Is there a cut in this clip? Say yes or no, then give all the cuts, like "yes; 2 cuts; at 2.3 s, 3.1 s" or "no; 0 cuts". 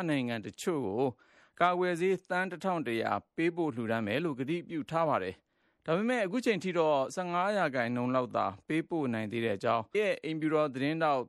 yes; 1 cut; at 9.9 s